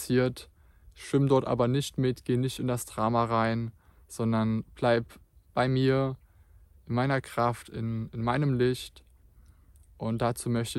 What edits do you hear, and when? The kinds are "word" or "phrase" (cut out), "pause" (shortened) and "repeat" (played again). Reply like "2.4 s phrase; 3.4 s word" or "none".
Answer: none